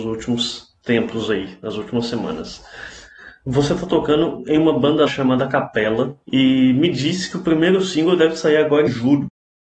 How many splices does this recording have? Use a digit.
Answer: 3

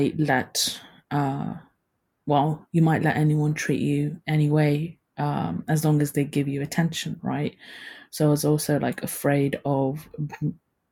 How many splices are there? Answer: 0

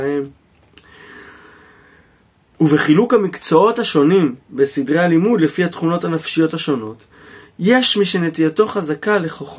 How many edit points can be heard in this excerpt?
0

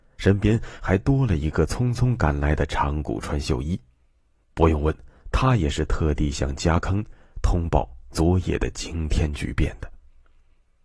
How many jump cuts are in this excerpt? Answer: 0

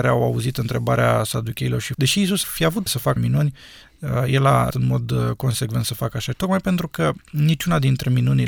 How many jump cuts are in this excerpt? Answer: 6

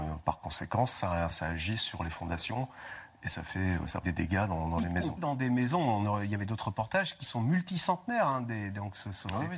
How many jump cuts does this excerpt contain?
3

